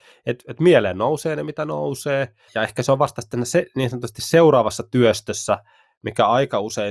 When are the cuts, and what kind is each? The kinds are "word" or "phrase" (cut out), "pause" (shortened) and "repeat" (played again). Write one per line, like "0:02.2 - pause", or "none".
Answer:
0:02.5 - word